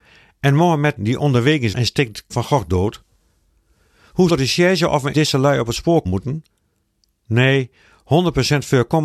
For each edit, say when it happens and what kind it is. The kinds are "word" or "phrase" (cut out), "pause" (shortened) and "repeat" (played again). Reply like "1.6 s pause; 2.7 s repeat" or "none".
1.0 s word; 1.7 s word; 2.3 s word; 4.3 s word; 5.1 s word; 6.0 s word

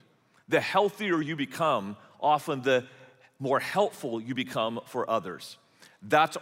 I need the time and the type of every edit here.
none

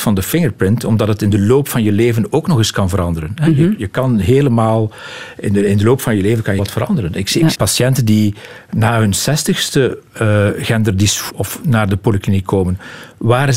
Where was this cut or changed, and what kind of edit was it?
6.6 s word; 7.5 s word; 11.3 s word

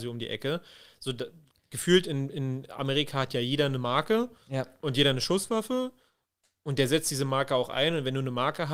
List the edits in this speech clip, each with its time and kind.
none

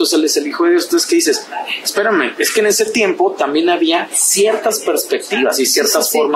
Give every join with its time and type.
none

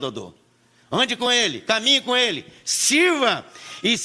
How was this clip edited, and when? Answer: none

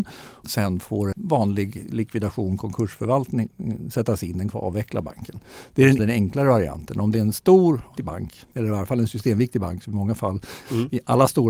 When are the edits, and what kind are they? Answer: 1.1 s word; 4.5 s word; 6.0 s word; 8.0 s word

